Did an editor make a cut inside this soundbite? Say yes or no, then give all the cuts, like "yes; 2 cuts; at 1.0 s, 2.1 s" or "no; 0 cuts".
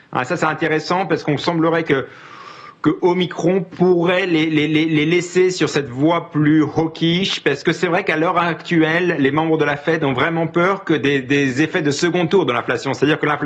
no; 0 cuts